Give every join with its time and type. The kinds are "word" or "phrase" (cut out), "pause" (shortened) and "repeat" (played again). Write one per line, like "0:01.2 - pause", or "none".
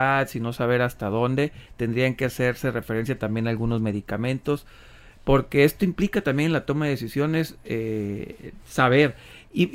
none